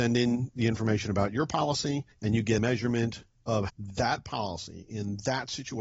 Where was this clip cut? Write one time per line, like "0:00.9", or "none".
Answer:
0:02.1
0:02.6
0:03.7

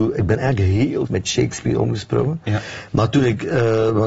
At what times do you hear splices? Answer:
0:01.1

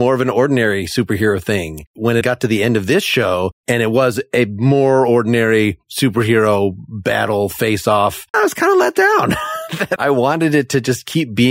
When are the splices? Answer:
0:02.2
0:08.3

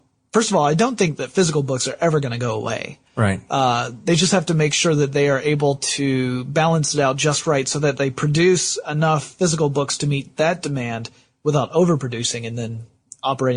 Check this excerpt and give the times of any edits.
none

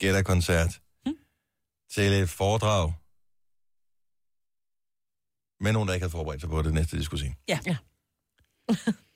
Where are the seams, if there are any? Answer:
none

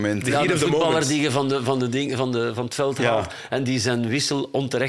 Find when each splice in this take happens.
none

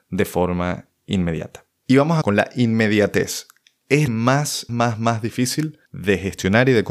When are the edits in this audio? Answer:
0:01.8
0:02.2
0:04.1
0:04.7
0:05.8

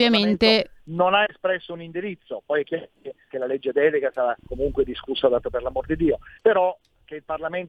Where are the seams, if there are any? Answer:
0:03.3
0:05.4
0:06.4

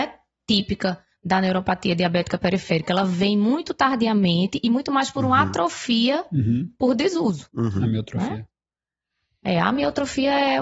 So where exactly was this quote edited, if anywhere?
none

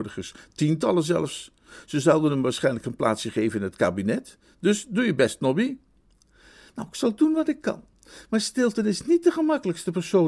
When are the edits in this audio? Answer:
none

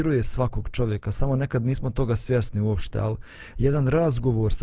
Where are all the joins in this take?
none

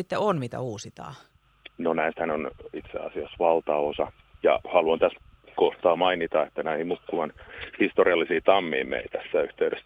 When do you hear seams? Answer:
none

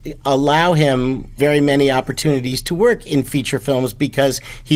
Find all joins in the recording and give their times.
none

